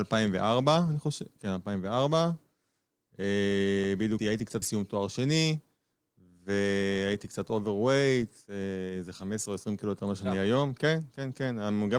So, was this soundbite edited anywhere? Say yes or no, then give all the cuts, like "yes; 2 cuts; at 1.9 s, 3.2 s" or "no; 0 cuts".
yes; 2 cuts; at 4.2 s, 4.6 s